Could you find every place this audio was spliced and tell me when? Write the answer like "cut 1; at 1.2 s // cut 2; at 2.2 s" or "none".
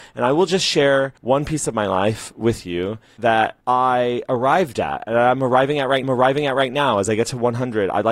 cut 1; at 1.2 s // cut 2; at 3.6 s // cut 3; at 6.0 s